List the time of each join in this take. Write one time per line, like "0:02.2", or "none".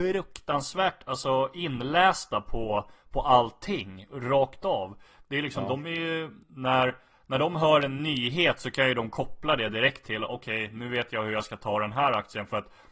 0:06.4